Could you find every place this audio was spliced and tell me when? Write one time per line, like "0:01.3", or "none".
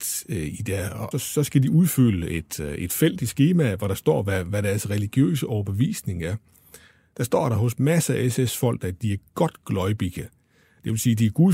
0:01.1